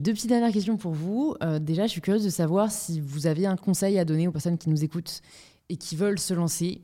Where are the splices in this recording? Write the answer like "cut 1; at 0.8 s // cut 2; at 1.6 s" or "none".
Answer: none